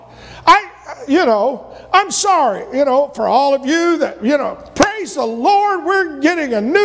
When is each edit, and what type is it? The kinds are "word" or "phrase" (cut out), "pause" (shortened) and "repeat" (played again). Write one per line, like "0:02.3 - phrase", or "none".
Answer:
none